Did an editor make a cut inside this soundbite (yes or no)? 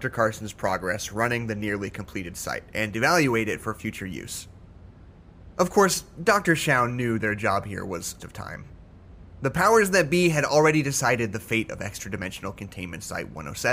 yes